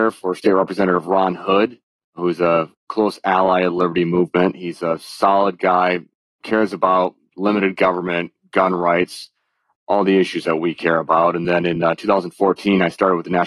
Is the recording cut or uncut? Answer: uncut